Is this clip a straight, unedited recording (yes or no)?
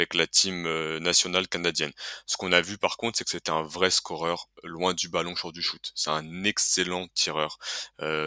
yes